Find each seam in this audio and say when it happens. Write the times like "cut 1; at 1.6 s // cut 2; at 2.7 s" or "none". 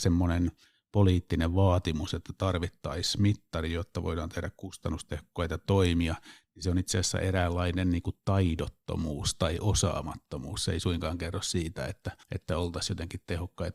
cut 1; at 12.2 s